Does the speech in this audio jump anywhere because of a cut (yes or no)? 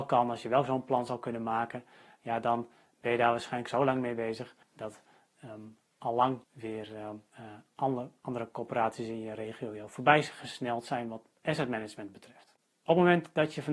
yes